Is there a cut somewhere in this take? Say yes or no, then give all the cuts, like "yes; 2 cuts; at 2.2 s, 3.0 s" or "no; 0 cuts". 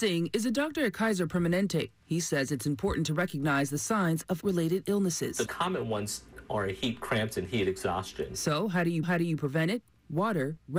yes; 3 cuts; at 4.4 s, 5.5 s, 9.0 s